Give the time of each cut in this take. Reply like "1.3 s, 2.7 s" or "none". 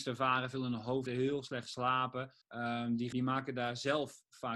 1.1 s, 2.4 s, 3.1 s